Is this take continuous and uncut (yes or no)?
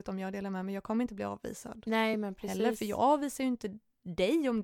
yes